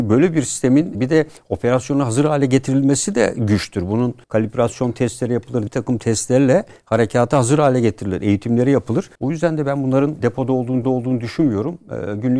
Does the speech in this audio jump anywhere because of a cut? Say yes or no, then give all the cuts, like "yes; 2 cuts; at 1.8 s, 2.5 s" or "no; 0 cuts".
yes; 6 cuts; at 0.9 s, 4.2 s, 5.7 s, 9.2 s, 10.2 s, 10.8 s